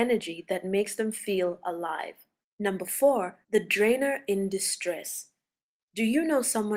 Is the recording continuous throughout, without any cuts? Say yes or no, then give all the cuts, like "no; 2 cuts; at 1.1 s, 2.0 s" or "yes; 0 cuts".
no; 2 cuts; at 2.4 s, 3.4 s